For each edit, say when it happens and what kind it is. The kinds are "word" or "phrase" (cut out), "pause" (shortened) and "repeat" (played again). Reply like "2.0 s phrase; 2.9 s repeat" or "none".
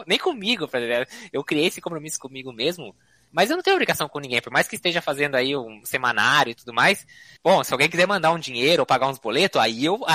none

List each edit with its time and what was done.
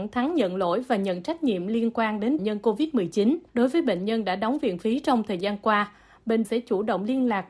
2.4 s phrase; 3.5 s pause; 6.4 s word

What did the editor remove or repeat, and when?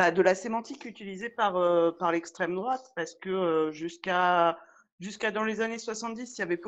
none

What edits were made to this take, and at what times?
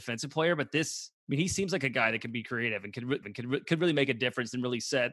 1.2 s pause; 3.2 s repeat

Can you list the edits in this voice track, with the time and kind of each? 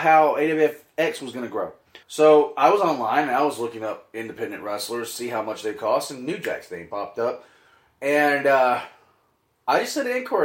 2.0 s pause

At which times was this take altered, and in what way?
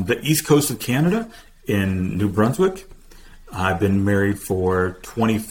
none

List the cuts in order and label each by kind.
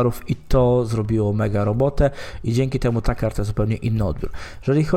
none

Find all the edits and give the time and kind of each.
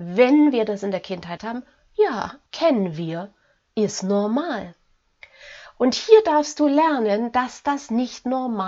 1.4 s word; 2.5 s pause

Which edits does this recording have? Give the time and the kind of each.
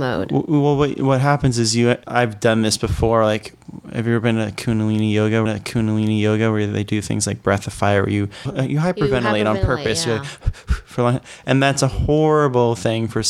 2.0 s word; 5.5 s repeat; 8.5 s word

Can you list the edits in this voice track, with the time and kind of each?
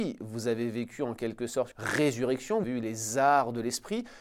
1.7 s word; 2.6 s phrase

